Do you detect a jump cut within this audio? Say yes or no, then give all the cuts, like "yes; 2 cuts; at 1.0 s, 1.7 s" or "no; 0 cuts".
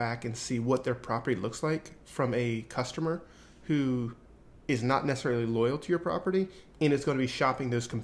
no; 0 cuts